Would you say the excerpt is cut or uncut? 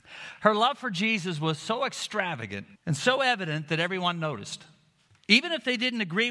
cut